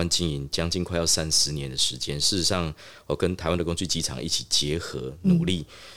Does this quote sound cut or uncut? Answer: uncut